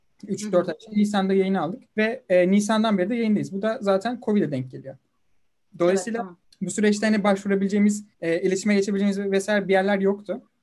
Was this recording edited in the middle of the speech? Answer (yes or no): yes